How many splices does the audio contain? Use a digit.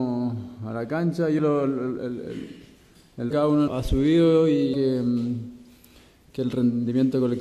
4